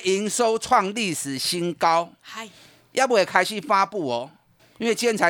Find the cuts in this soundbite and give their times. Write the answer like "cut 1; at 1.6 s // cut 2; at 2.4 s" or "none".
none